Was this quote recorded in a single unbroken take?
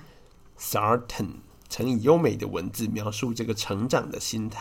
yes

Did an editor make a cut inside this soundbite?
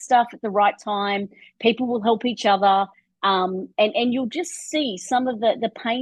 no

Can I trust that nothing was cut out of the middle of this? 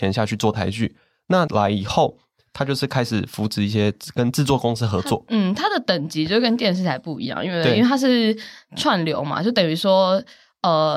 no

